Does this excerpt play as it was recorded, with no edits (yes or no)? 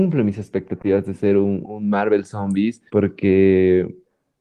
no